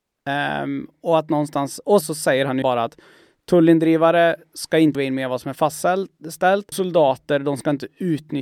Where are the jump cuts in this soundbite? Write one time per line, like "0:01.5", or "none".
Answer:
0:02.0
0:02.6
0:04.9
0:06.7